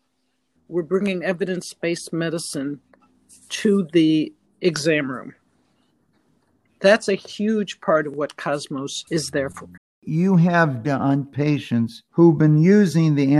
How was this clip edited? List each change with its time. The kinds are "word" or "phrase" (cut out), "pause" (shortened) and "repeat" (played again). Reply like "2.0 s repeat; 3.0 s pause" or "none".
9.1 s pause; 9.8 s pause; 10.8 s word